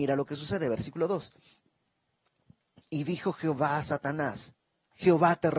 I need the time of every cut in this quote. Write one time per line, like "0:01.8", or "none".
none

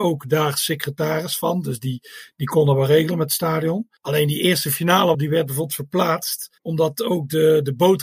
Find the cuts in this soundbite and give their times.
0:04.0
0:05.1
0:06.6

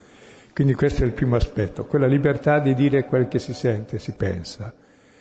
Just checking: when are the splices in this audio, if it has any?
none

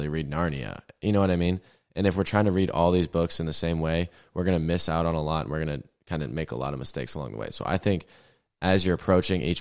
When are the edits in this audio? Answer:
none

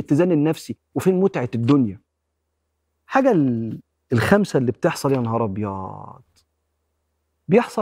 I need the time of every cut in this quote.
none

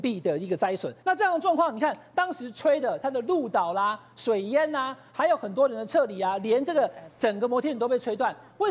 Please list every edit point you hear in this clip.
0:01.0

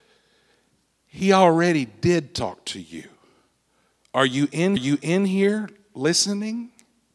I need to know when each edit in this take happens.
0:04.8

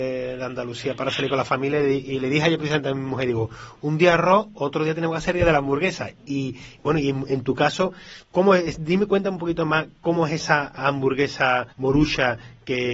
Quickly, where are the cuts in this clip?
0:08.2
0:11.7

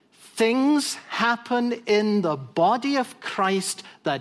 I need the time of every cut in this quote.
none

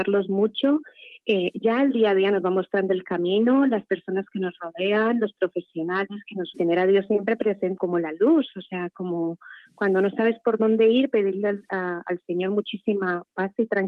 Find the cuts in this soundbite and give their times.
0:06.5
0:07.8

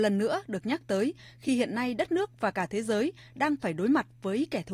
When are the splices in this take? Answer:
none

